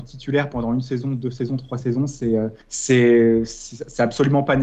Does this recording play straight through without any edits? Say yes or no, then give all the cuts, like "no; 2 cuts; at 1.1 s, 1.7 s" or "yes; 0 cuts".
no; 1 cut; at 2.6 s